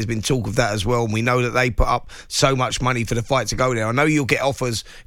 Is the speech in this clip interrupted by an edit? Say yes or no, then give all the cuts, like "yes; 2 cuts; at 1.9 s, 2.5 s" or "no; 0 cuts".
no; 0 cuts